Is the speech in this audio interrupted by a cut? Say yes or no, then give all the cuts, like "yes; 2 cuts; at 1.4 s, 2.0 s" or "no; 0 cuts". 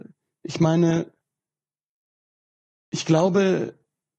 no; 0 cuts